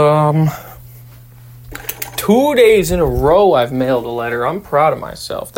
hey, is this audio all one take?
yes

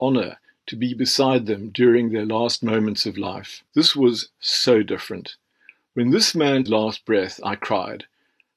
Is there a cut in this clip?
yes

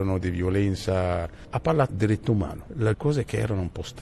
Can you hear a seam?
yes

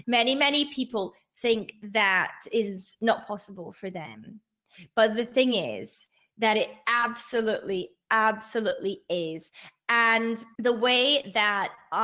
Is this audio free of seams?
yes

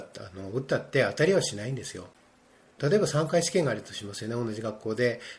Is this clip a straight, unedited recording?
yes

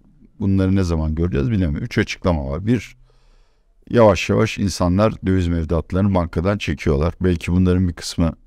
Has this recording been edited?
no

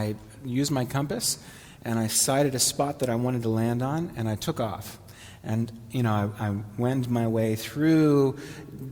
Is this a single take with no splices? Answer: yes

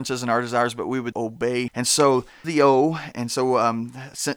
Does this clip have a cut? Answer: yes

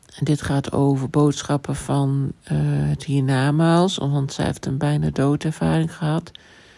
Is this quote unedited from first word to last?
no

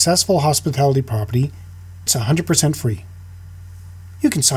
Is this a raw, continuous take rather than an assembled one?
no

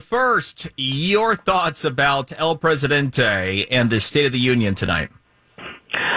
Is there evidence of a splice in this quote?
no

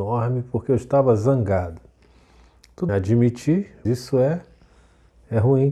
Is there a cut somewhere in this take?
yes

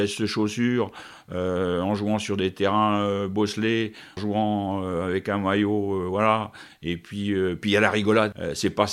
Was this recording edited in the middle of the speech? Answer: yes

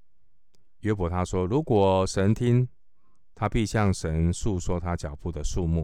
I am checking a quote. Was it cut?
no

